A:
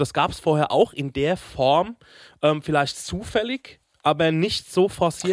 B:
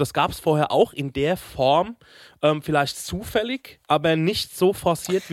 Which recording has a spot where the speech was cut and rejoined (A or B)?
B